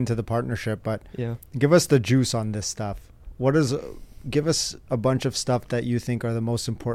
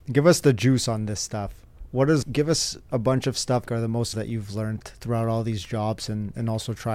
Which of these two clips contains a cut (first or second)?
second